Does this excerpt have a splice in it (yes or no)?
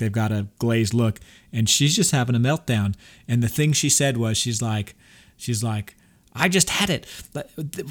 no